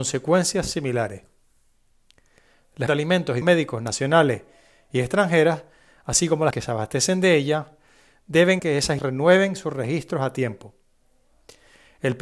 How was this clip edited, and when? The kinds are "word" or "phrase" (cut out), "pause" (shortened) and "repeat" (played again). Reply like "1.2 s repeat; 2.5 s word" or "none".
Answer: 2.9 s word; 3.4 s word; 6.5 s word; 8.6 s word; 9.0 s word